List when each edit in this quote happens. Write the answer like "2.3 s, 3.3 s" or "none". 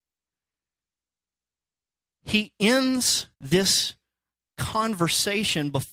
3.3 s